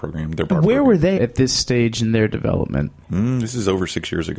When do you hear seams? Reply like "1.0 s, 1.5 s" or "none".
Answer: 1.2 s, 3.0 s